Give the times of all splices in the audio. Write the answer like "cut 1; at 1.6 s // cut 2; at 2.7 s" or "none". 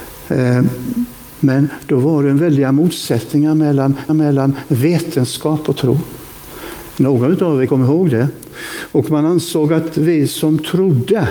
cut 1; at 4.1 s // cut 2; at 7.7 s